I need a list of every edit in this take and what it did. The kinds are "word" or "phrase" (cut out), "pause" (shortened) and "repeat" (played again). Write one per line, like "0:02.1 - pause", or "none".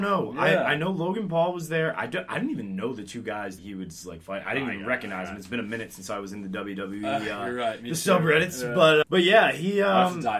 0:03.6 - word
0:09.0 - word